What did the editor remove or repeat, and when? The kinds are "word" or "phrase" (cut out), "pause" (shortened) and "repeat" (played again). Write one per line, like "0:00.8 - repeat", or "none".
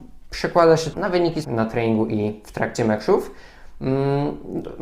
0:00.9 - phrase
0:01.4 - word

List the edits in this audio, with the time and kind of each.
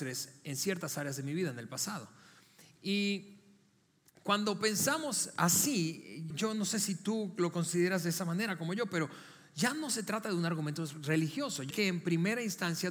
0:06.3 - word
0:11.7 - word

